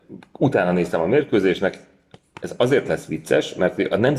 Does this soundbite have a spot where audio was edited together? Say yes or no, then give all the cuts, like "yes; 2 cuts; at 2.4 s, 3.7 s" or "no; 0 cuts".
no; 0 cuts